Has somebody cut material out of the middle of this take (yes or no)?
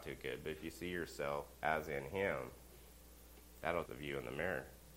yes